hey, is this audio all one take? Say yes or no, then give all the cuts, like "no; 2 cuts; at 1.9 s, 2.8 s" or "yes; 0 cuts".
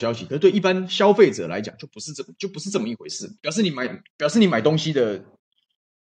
no; 1 cut; at 3.4 s